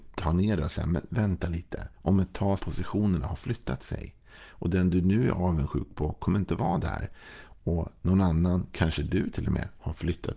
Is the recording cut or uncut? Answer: cut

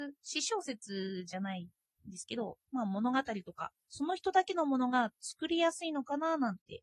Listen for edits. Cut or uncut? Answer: cut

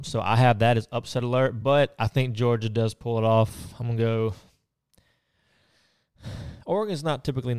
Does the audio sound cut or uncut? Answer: uncut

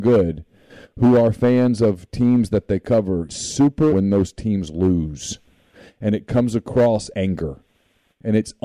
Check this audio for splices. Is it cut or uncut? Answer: cut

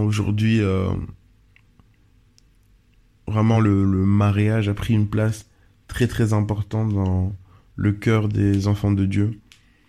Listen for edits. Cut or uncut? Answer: uncut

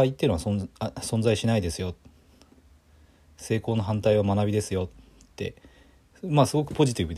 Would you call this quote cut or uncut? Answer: uncut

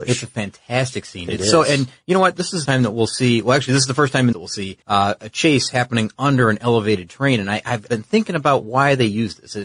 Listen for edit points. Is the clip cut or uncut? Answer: cut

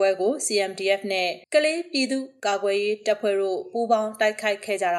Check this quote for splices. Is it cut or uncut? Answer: cut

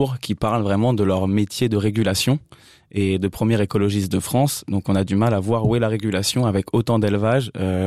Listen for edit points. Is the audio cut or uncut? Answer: uncut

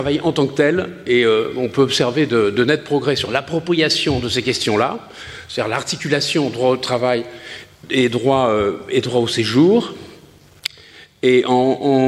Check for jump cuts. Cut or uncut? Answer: uncut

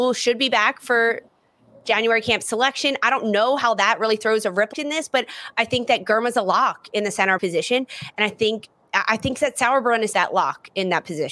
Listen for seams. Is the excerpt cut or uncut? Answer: cut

